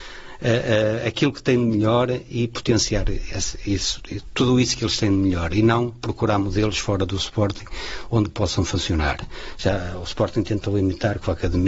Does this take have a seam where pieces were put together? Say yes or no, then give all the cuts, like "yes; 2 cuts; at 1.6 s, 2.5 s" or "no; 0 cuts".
no; 0 cuts